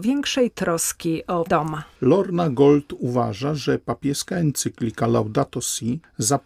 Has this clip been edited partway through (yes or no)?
yes